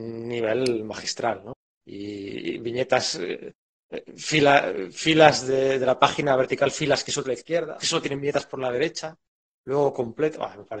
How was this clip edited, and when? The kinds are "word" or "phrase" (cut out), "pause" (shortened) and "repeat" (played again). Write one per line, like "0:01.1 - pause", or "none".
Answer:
0:01.6 - pause
0:07.2 - phrase
0:07.8 - word